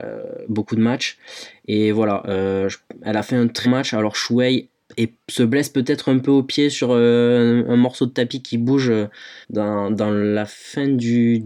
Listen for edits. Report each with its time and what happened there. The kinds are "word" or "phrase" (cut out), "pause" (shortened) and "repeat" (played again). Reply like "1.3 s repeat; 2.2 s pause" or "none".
3.6 s word; 5.2 s pause; 9.4 s pause